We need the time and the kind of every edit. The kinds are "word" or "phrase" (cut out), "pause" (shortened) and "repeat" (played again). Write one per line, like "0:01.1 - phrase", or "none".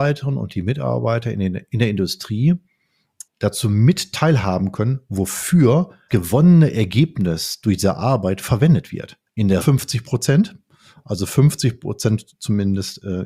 0:03.3 - word
0:06.1 - word
0:09.3 - pause
0:09.6 - phrase